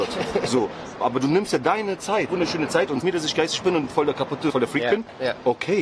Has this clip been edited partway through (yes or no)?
yes